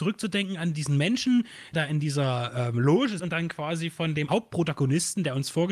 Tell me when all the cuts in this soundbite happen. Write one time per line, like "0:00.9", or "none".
0:01.7
0:03.2
0:04.3